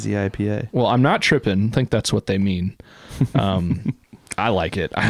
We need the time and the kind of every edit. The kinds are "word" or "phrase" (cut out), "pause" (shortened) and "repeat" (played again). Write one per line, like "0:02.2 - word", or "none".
0:01.7 - phrase